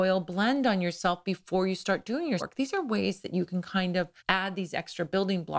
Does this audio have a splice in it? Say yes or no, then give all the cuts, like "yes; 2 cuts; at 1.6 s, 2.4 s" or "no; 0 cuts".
yes; 2 cuts; at 2.4 s, 4.2 s